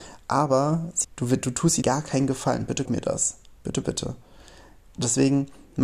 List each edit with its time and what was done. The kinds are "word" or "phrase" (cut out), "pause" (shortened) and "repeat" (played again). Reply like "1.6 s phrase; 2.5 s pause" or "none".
1.0 s word; 1.8 s word; 2.8 s word; 3.8 s word